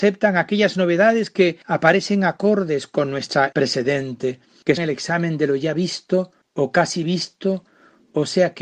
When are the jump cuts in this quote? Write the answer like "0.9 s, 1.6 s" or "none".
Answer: 3.5 s, 4.8 s